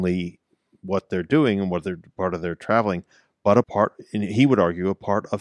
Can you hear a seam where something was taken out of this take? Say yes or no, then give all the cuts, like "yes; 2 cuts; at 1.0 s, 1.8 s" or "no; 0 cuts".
yes; 1 cut; at 3.6 s